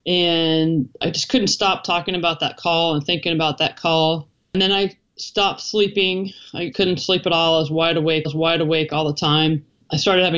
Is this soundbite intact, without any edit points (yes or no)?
no